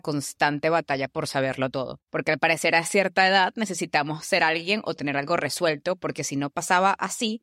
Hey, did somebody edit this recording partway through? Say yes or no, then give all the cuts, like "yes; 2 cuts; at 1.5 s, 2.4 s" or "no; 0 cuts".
no; 0 cuts